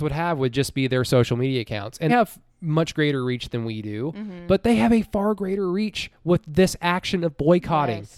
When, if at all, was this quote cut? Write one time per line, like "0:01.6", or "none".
0:02.1
0:02.5